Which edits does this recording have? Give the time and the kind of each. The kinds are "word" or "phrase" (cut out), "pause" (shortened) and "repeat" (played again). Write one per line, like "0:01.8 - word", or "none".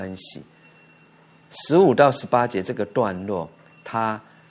none